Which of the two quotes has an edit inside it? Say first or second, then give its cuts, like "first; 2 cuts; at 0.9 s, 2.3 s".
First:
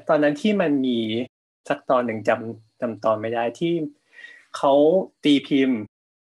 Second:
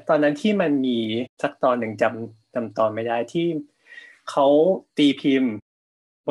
second; 1 cut; at 1.3 s